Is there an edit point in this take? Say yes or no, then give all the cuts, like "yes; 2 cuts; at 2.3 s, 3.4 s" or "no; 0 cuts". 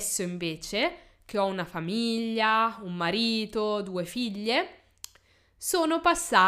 no; 0 cuts